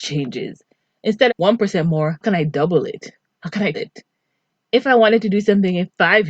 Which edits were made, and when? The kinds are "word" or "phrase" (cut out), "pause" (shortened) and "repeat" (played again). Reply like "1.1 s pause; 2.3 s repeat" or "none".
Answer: 1.3 s word; 2.2 s word; 3.7 s word